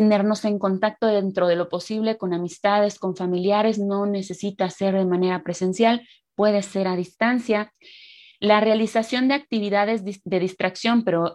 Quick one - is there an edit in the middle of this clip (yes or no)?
no